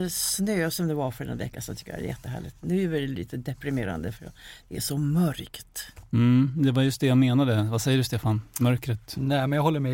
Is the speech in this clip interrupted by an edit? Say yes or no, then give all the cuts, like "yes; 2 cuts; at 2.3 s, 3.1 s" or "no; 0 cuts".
no; 0 cuts